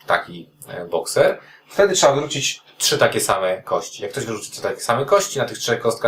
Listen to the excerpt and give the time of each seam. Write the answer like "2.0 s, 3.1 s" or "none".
none